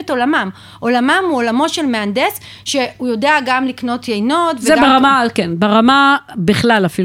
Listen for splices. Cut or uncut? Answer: uncut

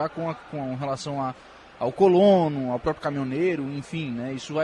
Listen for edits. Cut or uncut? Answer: uncut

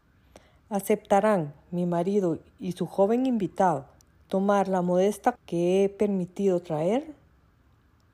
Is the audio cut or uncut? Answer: cut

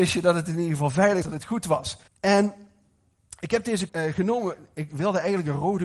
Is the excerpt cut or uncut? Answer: cut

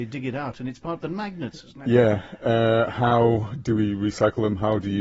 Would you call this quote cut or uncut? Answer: uncut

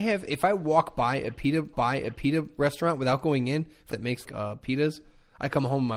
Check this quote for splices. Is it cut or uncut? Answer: cut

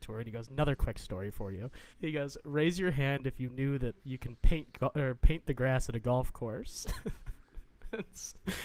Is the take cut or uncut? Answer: cut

